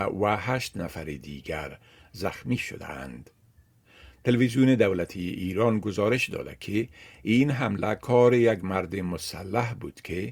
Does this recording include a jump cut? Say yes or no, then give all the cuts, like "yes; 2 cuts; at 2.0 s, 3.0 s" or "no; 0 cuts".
no; 0 cuts